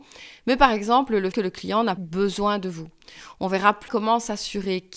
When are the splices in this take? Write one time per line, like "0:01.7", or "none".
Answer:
0:01.3
0:02.0
0:03.9